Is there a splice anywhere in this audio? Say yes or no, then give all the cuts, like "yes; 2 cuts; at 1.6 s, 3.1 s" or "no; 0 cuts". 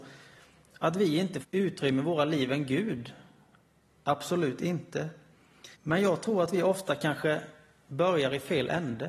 yes; 2 cuts; at 1.4 s, 5.7 s